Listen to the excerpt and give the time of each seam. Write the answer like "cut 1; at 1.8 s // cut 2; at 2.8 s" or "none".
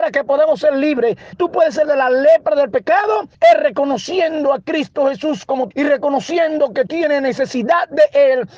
cut 1; at 1.3 s // cut 2; at 1.8 s // cut 3; at 3.3 s // cut 4; at 5.7 s // cut 5; at 6.9 s